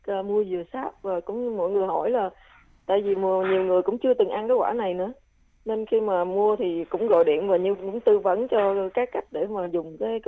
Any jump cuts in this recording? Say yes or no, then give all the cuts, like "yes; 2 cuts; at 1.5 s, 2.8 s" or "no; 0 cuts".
no; 0 cuts